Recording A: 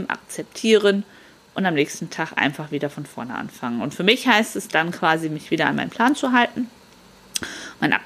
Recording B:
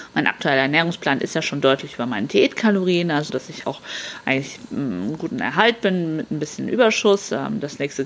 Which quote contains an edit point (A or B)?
B